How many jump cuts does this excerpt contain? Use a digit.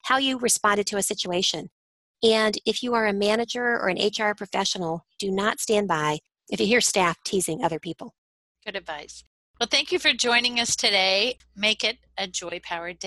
1